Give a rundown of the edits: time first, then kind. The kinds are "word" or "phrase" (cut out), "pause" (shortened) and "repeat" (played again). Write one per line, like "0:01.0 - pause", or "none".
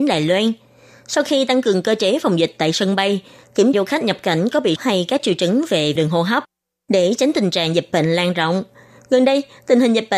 0:03.7 - word
0:04.8 - word
0:06.0 - word